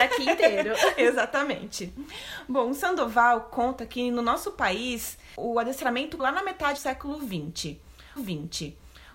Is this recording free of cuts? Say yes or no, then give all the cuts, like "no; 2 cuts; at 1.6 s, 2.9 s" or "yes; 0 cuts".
no; 3 cuts; at 6.2 s, 6.8 s, 8.2 s